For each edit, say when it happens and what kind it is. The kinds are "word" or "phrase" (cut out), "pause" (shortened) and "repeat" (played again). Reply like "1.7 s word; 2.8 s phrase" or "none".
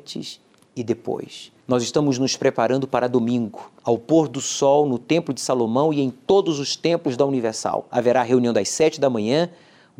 1.6 s pause; 3.8 s pause